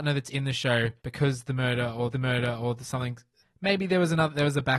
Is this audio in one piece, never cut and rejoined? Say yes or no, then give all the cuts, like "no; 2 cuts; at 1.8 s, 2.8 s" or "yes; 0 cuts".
no; 3 cuts; at 1.0 s, 2.1 s, 3.4 s